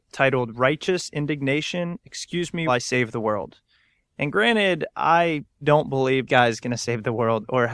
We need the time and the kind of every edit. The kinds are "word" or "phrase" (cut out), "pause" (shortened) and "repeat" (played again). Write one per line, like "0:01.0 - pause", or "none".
0:02.7 - word
0:05.6 - word
0:06.3 - word